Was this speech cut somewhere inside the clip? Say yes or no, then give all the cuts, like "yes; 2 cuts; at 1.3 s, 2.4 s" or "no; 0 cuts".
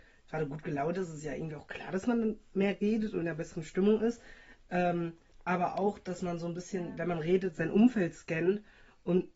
yes; 1 cut; at 3.2 s